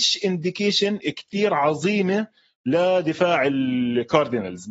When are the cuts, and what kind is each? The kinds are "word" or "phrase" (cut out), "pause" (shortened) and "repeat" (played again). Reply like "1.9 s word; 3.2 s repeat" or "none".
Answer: none